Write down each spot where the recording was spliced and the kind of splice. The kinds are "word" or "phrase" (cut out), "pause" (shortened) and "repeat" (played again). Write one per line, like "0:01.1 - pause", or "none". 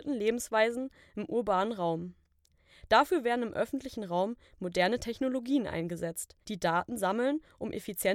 0:06.4 - pause